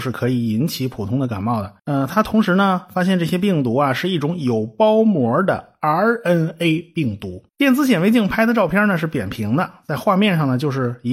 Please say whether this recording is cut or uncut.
cut